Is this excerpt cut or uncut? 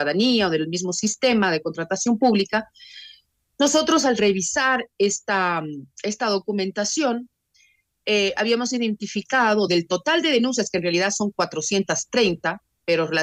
uncut